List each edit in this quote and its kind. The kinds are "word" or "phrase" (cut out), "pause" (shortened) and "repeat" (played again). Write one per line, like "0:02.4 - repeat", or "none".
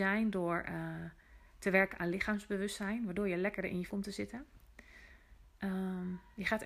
0:03.9 - word